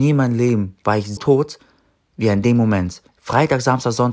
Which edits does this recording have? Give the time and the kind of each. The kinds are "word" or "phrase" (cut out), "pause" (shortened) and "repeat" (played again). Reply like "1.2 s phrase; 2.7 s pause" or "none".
1.2 s word; 3.1 s pause